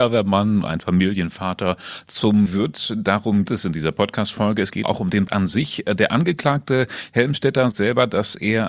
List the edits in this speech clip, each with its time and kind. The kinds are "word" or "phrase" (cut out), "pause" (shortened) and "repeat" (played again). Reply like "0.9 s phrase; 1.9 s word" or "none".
2.5 s word; 3.5 s word; 4.8 s word; 5.3 s word; 7.7 s word